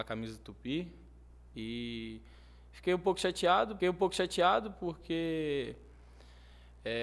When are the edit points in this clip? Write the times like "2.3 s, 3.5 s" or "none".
3.8 s